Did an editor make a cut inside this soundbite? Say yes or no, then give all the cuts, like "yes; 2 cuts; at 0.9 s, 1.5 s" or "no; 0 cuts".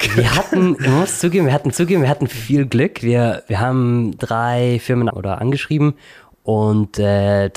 yes; 3 cuts; at 1.7 s, 4.2 s, 5.1 s